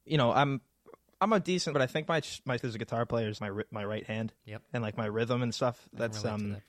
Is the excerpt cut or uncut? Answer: cut